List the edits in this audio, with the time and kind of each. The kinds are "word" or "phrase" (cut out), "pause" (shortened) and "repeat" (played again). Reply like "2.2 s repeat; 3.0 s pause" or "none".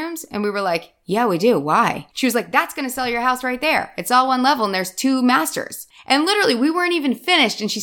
2.1 s pause